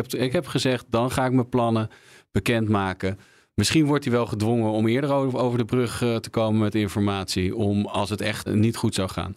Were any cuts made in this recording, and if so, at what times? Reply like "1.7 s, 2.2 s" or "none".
8.5 s